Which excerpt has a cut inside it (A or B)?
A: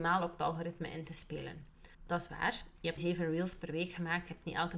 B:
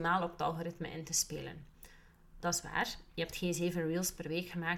A